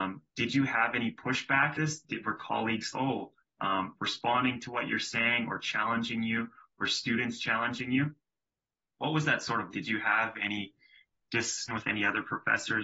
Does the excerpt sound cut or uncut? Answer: cut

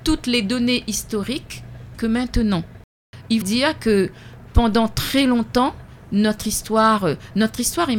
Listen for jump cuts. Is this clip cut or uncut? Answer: cut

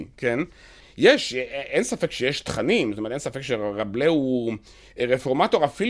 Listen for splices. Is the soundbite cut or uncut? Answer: uncut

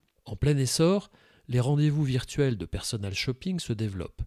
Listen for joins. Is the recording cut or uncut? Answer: uncut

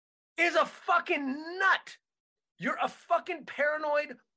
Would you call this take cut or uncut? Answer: uncut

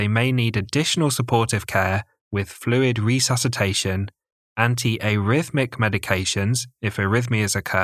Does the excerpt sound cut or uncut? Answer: uncut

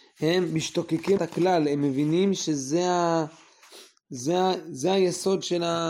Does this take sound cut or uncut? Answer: cut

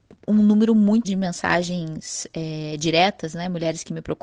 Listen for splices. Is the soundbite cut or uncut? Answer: cut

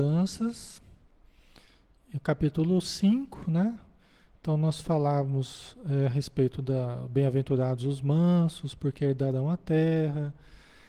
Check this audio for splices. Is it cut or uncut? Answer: uncut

